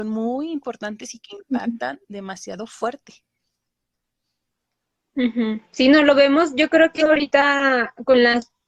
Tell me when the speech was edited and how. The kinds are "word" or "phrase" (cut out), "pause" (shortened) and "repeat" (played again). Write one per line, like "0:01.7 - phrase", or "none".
0:05.6 - pause
0:07.0 - word